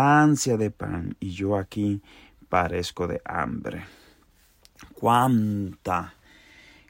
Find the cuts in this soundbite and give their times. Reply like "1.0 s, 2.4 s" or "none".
none